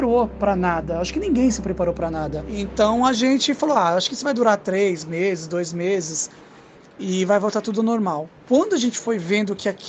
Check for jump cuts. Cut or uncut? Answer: uncut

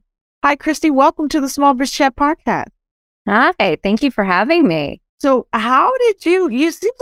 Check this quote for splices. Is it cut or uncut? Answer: cut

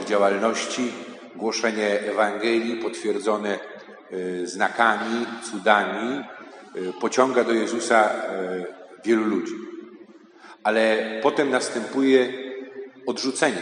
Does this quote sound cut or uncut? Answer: uncut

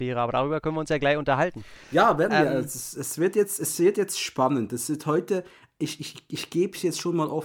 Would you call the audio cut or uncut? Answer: uncut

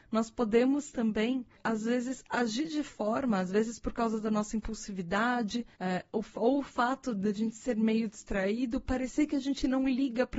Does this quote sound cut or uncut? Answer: cut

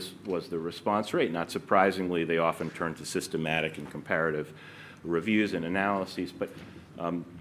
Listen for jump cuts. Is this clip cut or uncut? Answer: uncut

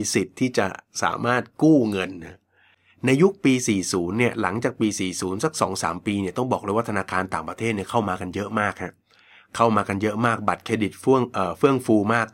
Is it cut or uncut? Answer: uncut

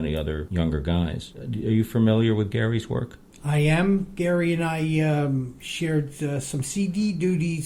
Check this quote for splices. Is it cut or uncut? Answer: uncut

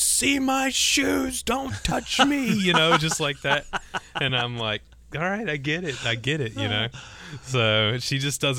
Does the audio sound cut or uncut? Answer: uncut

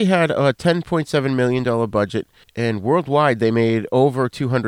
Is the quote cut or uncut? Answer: cut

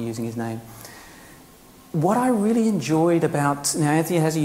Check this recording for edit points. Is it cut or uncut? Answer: uncut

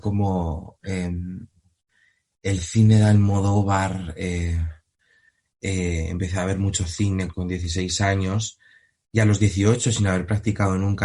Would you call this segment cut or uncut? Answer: cut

